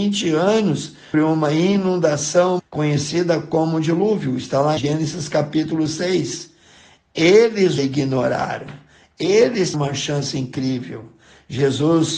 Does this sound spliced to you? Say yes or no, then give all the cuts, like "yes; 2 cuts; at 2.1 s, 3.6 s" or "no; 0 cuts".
yes; 5 cuts; at 1.1 s, 2.6 s, 4.8 s, 7.8 s, 9.7 s